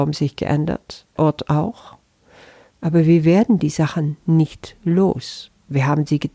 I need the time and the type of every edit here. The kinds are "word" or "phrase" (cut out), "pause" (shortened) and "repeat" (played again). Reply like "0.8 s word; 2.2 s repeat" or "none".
1.2 s word